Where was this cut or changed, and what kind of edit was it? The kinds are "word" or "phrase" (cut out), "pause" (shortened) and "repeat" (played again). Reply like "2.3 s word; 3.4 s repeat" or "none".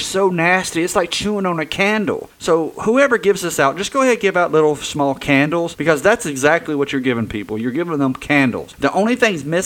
none